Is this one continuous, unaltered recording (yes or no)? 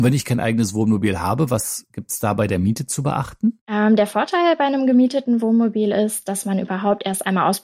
yes